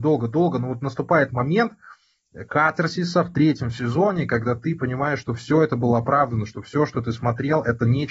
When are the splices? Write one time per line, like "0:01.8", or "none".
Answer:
none